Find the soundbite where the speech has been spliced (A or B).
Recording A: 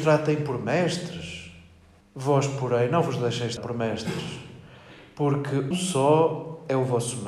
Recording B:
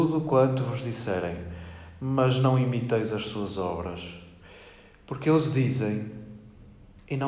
A